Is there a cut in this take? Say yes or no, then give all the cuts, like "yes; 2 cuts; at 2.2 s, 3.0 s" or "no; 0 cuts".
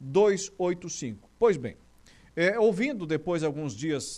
no; 0 cuts